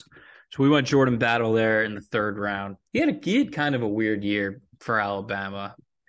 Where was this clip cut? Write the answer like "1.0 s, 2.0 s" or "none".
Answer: 2.9 s